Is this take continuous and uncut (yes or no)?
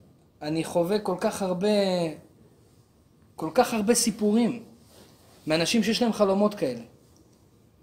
yes